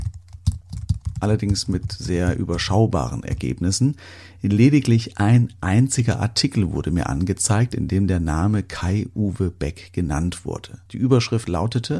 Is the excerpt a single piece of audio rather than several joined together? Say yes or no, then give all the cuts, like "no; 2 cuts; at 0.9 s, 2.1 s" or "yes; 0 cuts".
no; 1 cut; at 10.9 s